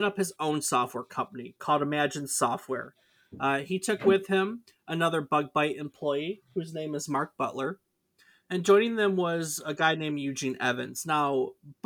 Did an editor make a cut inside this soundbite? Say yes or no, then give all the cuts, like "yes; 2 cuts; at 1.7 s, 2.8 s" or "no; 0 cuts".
no; 0 cuts